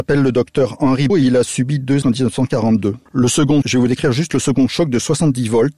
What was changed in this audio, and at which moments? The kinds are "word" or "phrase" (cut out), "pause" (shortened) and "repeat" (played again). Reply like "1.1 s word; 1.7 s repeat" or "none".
1.1 s word; 2.0 s word; 3.1 s pause; 3.6 s word